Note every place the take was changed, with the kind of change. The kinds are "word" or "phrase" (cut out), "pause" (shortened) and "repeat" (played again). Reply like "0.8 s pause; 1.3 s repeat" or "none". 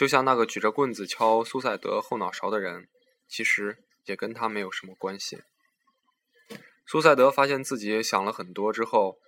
none